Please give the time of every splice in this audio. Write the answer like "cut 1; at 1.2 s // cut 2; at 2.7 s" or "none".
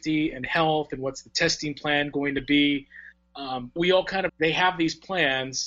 cut 1; at 3.8 s // cut 2; at 4.3 s